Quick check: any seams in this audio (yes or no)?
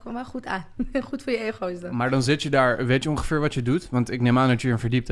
no